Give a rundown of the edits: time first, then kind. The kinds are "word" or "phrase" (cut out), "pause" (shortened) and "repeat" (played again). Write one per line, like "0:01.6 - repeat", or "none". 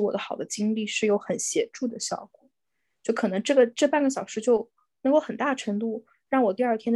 none

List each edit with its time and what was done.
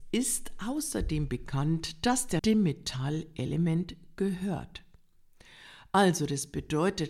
0:02.4 - word

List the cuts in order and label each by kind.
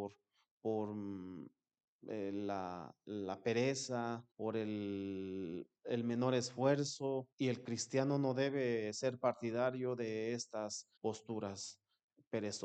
0:04.3 - pause
0:05.8 - pause
0:07.3 - pause
0:11.0 - pause

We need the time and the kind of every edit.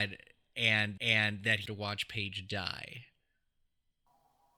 0:01.0 - repeat
0:01.7 - phrase

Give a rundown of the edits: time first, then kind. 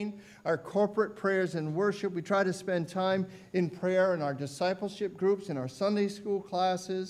none

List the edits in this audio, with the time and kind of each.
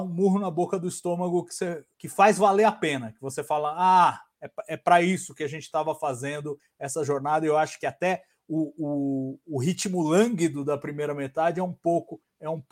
none

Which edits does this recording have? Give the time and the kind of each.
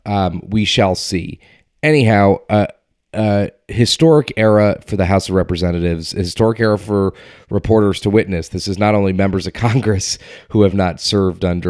none

